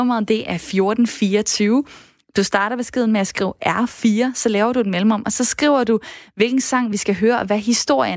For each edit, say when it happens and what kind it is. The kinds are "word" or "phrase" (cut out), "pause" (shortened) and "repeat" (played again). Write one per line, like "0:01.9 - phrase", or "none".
none